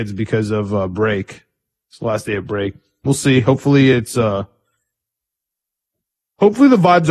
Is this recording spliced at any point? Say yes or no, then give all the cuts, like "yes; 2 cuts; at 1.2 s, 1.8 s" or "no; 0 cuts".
no; 0 cuts